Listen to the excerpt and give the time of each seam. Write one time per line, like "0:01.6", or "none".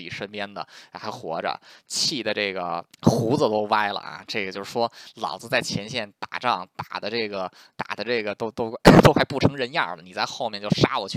0:02.9